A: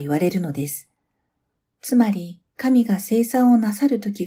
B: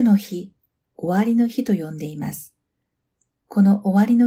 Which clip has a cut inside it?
A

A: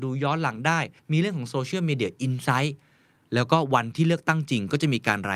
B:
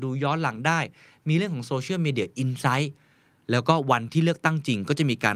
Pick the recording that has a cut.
A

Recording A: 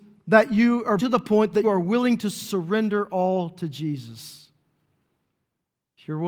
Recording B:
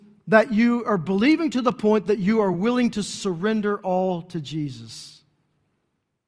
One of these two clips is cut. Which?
A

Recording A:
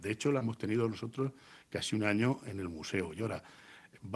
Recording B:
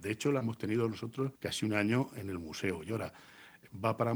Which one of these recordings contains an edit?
B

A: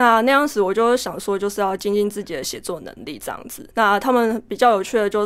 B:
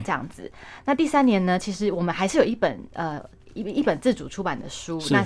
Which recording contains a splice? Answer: A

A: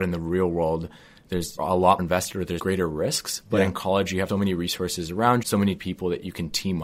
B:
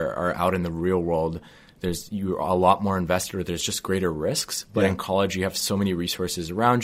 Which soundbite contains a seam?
A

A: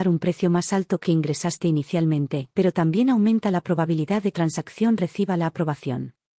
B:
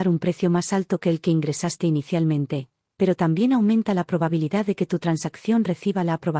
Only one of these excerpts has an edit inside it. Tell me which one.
A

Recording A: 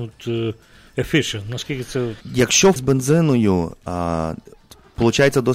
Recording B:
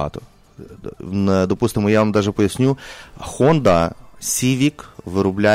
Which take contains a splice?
A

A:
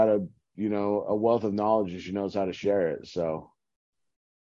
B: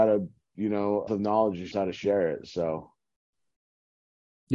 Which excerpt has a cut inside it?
B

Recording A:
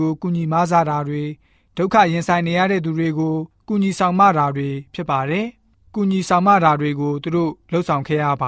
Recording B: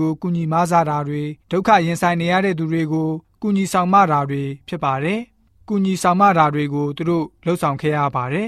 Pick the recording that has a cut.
B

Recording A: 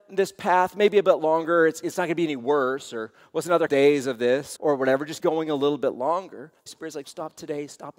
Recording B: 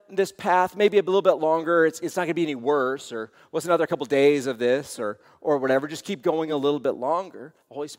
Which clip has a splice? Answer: A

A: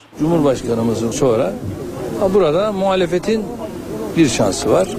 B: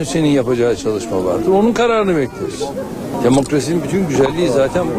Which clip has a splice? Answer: A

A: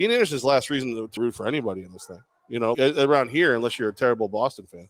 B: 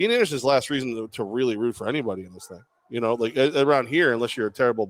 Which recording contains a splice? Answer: A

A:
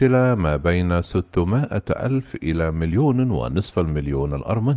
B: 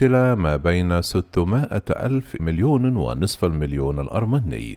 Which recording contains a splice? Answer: B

